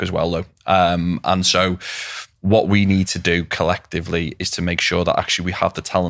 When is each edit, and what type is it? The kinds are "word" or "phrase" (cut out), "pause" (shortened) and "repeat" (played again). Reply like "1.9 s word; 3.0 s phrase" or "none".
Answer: 2.3 s pause